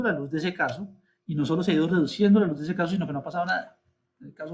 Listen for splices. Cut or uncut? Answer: uncut